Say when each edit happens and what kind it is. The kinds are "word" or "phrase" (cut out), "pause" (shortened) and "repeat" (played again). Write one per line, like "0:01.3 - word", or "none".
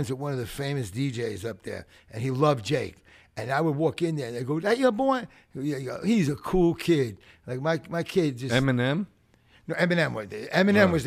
none

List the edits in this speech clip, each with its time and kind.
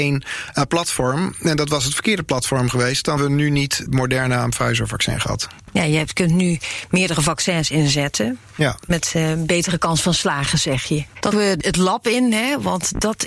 0:03.2 - word
0:03.9 - word
0:11.3 - word

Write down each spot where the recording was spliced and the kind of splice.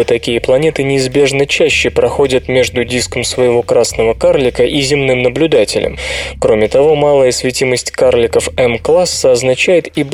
none

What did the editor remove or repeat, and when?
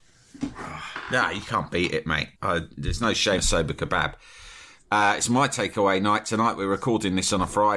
0:02.4 - pause
0:03.4 - word

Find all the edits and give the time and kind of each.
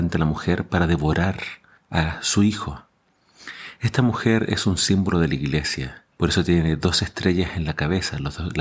0:01.8 - pause
0:06.1 - pause

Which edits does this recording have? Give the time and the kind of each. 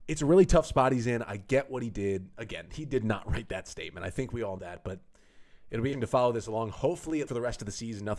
0:04.6 - word
0:05.9 - word
0:07.3 - word

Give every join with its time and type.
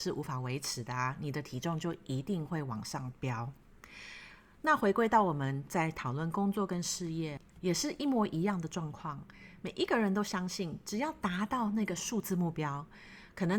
0:07.5 - pause

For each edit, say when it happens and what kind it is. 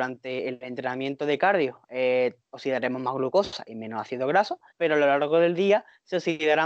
0:02.4 - pause
0:04.7 - pause

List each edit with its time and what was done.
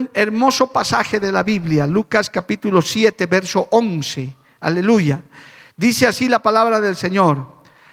none

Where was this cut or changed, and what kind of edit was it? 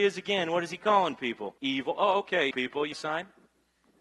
0:01.6 - pause
0:02.5 - word
0:02.9 - word

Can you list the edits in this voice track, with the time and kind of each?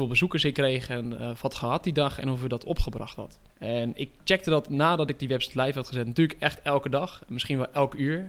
0:03.5 - pause

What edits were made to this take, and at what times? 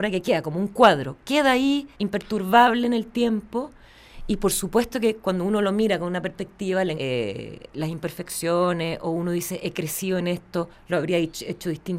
0:01.9 - pause
0:06.9 - word

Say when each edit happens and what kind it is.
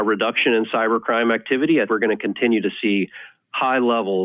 0:01.9 - word

